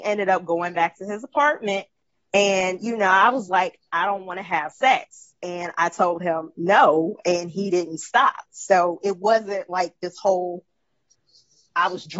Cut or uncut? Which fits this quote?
uncut